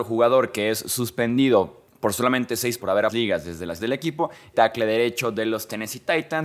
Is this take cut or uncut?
cut